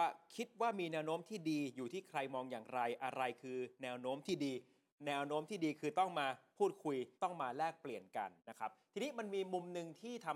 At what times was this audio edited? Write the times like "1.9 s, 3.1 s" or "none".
7.1 s, 8.4 s

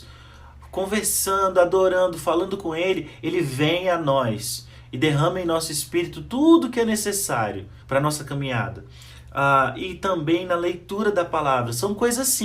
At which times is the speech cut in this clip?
7.8 s

